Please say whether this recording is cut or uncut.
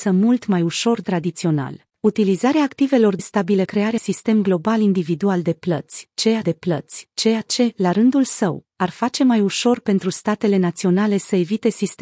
cut